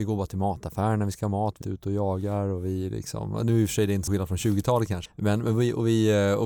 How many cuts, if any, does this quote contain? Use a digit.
3